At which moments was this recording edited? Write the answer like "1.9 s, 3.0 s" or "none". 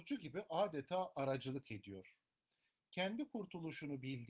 none